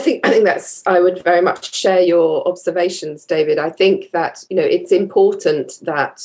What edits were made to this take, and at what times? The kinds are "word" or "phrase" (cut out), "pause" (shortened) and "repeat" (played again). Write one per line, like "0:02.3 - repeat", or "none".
none